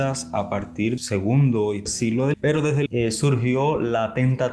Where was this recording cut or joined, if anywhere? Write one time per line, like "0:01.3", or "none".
0:01.0
0:01.9
0:02.3
0:02.9